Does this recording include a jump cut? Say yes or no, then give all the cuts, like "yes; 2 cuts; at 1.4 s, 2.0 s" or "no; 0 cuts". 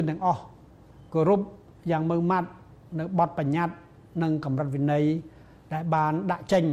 no; 0 cuts